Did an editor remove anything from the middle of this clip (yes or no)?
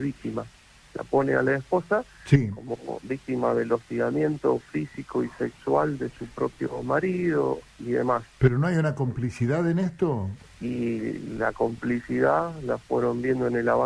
no